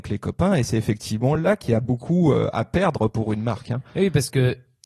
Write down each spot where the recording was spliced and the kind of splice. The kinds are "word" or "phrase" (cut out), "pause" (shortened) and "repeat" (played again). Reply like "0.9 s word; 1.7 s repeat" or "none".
none